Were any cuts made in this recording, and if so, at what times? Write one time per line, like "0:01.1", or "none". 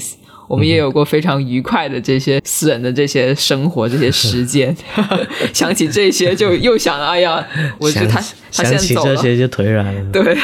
0:02.4
0:07.8